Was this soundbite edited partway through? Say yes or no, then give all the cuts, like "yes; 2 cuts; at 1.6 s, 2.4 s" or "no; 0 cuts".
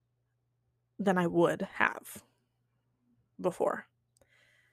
no; 0 cuts